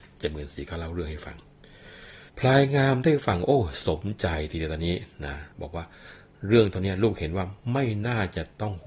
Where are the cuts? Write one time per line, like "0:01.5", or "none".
0:02.3
0:05.5